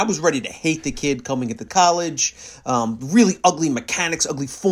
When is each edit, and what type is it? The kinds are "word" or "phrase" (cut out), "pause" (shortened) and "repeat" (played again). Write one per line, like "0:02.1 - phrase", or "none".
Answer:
none